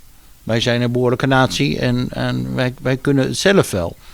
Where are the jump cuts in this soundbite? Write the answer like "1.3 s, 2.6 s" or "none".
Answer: none